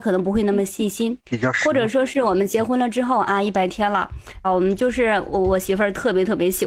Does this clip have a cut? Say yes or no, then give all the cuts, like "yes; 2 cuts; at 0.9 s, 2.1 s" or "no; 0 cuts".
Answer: yes; 2 cuts; at 1.2 s, 4.4 s